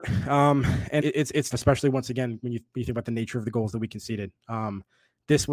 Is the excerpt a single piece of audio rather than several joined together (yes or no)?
no